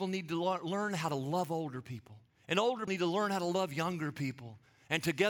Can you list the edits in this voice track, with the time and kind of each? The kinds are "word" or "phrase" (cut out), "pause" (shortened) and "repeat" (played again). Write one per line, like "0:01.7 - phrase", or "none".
0:02.3 - pause
0:02.9 - word